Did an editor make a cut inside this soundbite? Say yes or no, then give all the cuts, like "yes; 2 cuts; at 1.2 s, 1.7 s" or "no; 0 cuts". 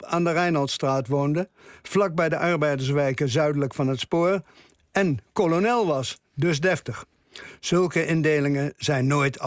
no; 0 cuts